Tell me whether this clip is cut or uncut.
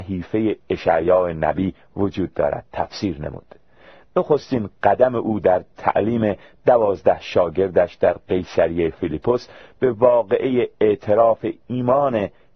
uncut